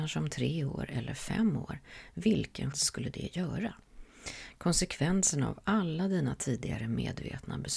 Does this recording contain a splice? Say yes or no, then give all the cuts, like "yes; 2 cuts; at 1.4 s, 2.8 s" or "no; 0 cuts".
yes; 1 cut; at 2.7 s